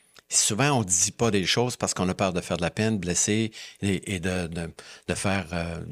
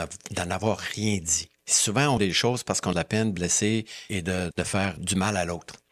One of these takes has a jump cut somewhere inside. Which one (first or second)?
second